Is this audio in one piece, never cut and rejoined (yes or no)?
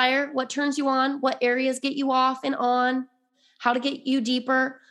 yes